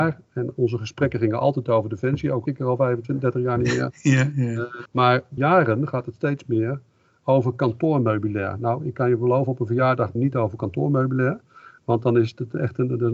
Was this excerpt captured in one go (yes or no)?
no